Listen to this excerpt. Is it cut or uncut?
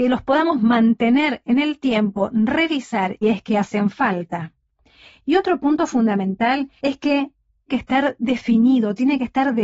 cut